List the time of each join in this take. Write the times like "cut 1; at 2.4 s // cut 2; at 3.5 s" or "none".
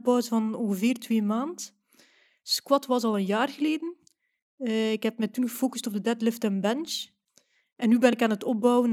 none